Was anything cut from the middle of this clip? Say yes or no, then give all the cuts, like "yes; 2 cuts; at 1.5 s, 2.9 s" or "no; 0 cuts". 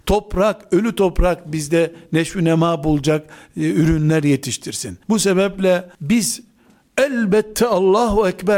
yes; 2 cuts; at 5.0 s, 5.9 s